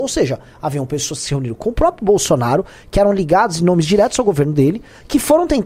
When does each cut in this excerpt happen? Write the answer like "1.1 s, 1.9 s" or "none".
none